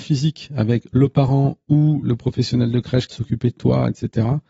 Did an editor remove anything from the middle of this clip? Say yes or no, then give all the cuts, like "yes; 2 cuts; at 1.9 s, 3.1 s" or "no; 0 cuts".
yes; 1 cut; at 3.1 s